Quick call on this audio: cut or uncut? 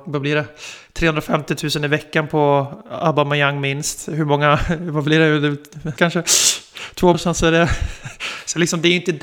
cut